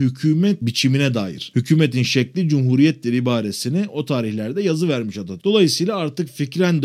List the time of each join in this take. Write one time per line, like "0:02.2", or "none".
none